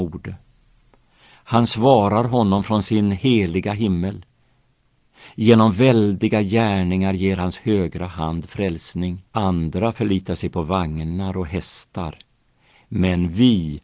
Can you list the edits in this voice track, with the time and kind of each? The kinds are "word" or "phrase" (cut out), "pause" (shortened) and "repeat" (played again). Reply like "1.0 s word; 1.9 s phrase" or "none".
9.3 s pause